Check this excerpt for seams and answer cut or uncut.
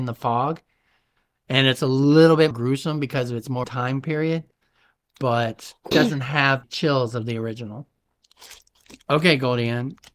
cut